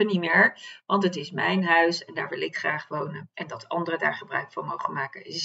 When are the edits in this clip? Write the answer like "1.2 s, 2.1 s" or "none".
3.3 s